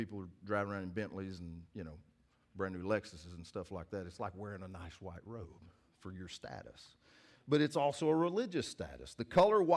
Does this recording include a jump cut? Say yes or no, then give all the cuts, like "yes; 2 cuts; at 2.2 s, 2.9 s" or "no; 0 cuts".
no; 0 cuts